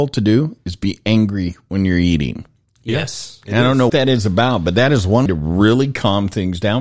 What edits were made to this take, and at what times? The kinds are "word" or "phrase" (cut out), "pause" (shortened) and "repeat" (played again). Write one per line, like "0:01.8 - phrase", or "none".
0:03.9 - word
0:05.3 - word